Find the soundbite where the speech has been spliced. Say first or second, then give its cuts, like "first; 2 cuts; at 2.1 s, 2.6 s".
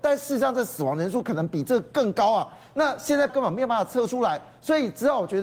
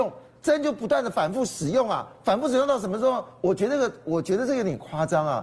first; 1 cut; at 3.3 s